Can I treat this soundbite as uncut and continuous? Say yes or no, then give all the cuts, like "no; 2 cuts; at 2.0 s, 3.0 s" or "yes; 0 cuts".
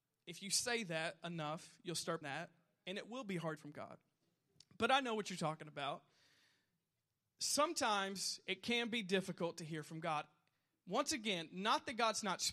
no; 2 cuts; at 2.2 s, 3.6 s